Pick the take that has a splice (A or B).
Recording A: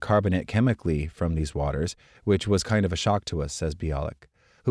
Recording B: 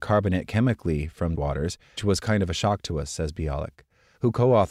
B